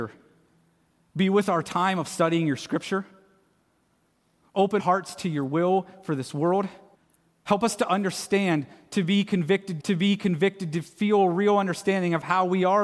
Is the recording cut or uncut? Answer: cut